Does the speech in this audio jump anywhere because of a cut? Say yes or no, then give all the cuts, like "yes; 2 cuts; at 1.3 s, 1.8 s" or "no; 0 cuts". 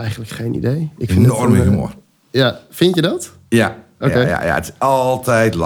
no; 0 cuts